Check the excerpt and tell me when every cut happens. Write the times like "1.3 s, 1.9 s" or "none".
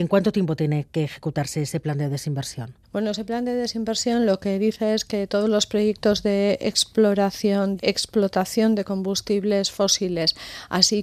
2.8 s, 7.8 s

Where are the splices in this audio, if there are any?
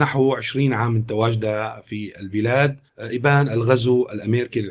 2.9 s

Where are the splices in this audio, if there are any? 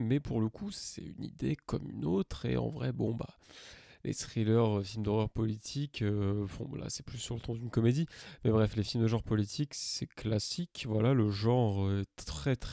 none

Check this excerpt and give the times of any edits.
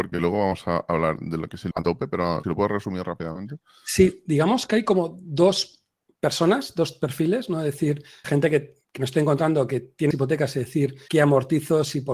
1.7 s, 2.4 s, 8.2 s, 10.1 s, 11.1 s

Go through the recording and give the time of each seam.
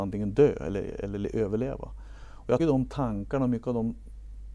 2.6 s

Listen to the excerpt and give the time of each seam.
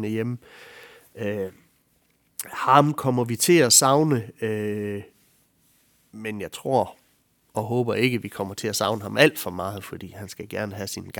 none

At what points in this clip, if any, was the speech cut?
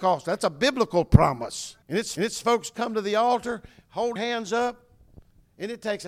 1.8 s, 2.2 s, 4.2 s

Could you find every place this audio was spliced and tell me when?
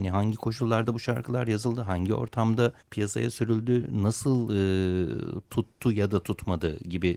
2.8 s

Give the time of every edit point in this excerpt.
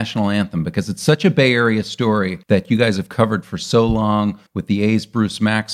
2.4 s, 4.5 s

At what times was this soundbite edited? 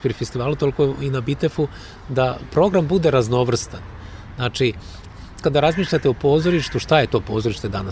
5.4 s

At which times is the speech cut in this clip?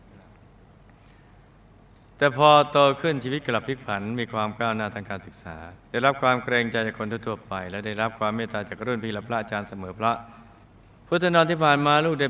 5.8 s, 10.6 s

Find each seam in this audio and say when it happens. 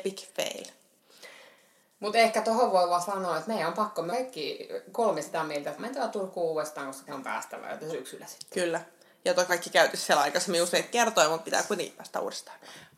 4.1 s, 5.8 s, 7.1 s, 7.9 s, 9.5 s

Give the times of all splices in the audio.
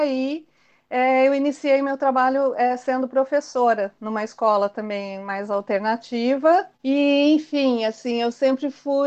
6.7 s

